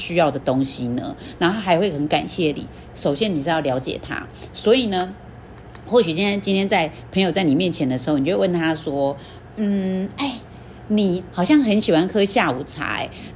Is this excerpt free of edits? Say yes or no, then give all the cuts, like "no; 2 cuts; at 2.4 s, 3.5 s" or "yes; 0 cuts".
yes; 0 cuts